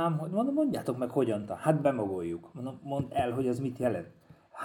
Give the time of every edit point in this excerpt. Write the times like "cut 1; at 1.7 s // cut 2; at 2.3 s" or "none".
none